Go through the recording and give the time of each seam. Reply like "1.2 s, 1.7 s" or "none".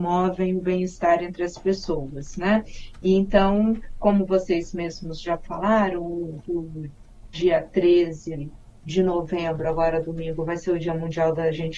none